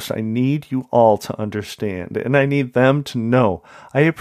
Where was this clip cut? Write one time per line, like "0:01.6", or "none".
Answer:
none